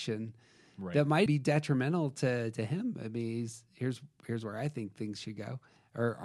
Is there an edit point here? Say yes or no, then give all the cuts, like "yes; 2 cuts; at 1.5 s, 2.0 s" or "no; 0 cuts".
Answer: yes; 1 cut; at 1.3 s